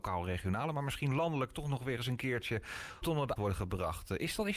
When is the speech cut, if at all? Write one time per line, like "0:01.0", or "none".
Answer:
0:03.0
0:03.4